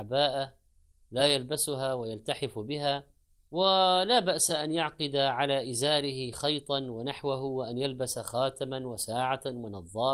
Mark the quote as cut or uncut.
uncut